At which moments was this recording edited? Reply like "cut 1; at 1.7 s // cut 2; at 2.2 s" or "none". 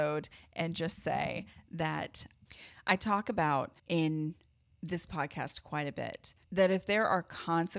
cut 1; at 3.8 s // cut 2; at 6.4 s